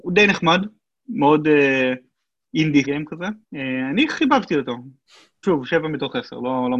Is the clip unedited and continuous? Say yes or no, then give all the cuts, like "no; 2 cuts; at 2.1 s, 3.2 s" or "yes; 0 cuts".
no; 3 cuts; at 2.8 s, 3.4 s, 5.4 s